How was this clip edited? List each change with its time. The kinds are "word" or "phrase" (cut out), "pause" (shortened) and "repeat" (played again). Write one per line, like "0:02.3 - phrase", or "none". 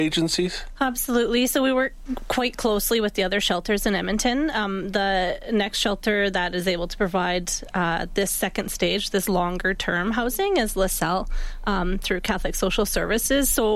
none